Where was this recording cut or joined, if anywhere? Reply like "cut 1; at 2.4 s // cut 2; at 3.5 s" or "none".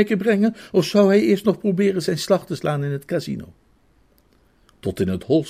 none

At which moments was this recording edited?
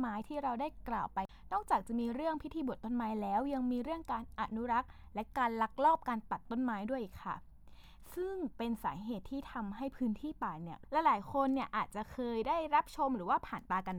cut 1; at 10.8 s

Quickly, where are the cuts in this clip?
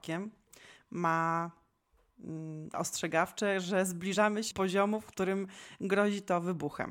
cut 1; at 2.7 s // cut 2; at 4.5 s

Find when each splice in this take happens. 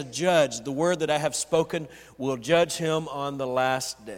none

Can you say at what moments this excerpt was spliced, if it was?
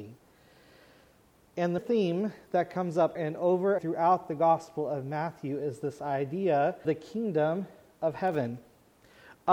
cut 1; at 1.8 s // cut 2; at 3.2 s // cut 3; at 3.8 s // cut 4; at 6.8 s

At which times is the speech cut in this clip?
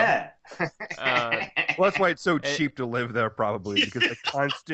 none

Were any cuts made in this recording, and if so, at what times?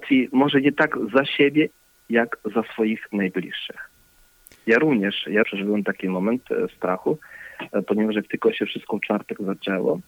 cut 1; at 5.4 s

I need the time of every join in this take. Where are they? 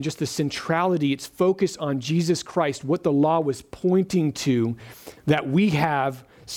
none

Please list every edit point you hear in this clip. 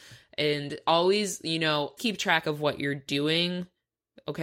cut 1; at 2.0 s

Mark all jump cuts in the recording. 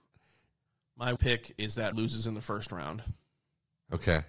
cut 1; at 1.2 s // cut 2; at 1.9 s

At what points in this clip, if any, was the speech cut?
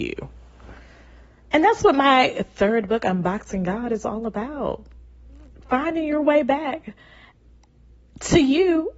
cut 1; at 5.5 s

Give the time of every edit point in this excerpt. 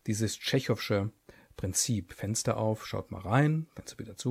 none

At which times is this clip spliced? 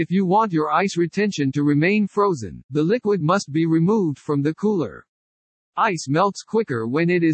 none

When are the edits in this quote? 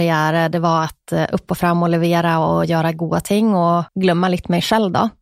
cut 1; at 3.9 s

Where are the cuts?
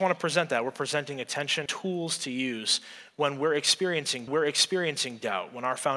cut 1; at 1.7 s // cut 2; at 4.3 s

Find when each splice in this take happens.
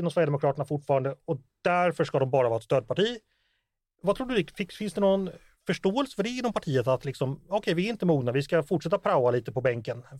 none

